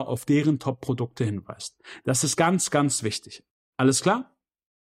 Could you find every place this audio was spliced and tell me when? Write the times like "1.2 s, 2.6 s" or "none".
none